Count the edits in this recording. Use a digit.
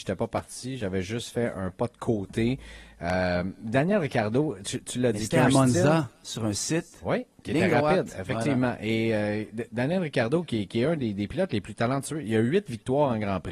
1